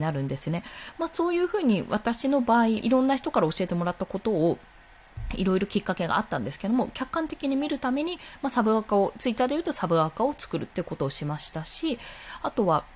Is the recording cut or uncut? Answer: cut